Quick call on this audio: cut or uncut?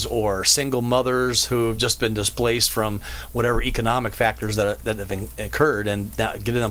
uncut